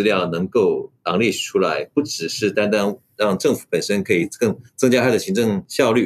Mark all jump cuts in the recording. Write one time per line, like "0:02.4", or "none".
0:04.7

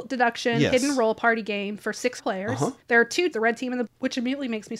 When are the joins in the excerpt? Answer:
0:02.2
0:02.8
0:03.3
0:03.9

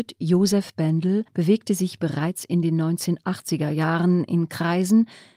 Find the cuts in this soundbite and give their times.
0:01.3

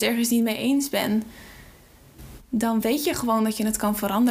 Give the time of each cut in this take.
none

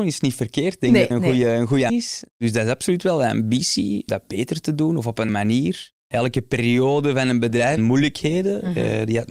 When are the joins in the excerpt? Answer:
0:01.1
0:01.9
0:04.1
0:05.3
0:06.0
0:07.8

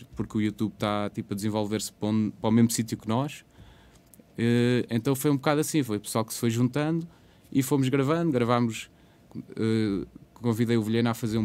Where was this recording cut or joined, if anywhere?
none

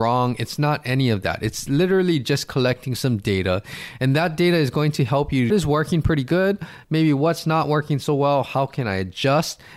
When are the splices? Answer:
0:05.5

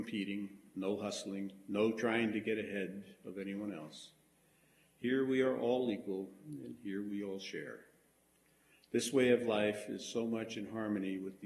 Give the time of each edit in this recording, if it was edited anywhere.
none

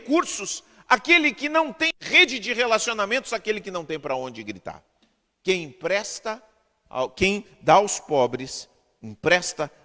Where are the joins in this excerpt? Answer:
none

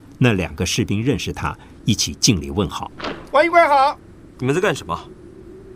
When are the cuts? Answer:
none

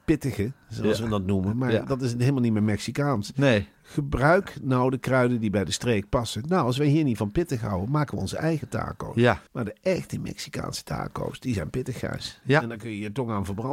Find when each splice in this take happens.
0:09.5

